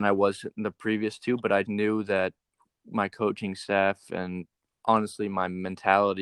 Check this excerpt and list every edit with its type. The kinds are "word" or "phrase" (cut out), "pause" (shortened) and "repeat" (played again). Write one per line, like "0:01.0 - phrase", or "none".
0:01.6 - word